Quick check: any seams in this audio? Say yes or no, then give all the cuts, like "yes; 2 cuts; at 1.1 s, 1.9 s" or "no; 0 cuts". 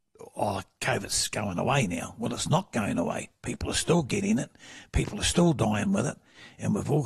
no; 0 cuts